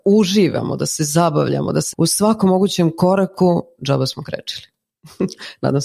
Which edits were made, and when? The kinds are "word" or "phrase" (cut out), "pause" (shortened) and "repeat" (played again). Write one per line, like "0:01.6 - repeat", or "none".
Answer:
0:01.9 - word